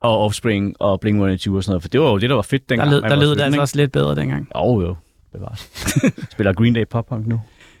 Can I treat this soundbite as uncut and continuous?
yes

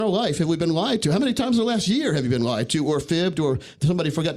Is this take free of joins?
yes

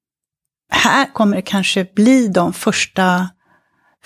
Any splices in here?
no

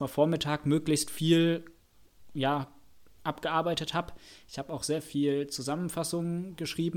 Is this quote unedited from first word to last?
yes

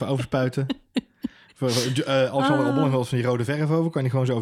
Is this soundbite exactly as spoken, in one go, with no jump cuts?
yes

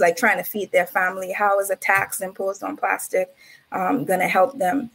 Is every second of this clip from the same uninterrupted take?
yes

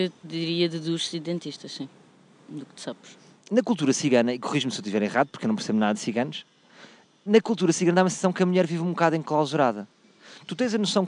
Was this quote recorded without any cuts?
yes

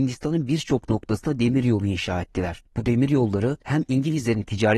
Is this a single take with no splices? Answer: yes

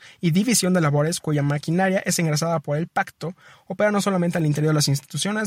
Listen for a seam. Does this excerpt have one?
no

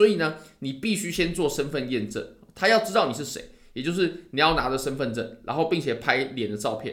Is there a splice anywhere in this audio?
no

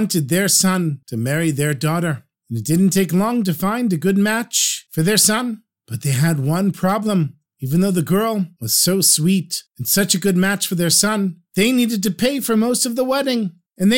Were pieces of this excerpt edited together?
no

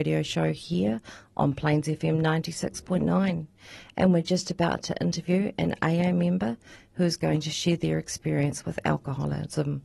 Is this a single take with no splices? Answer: yes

